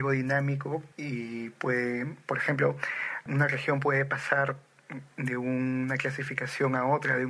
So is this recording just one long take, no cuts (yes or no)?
no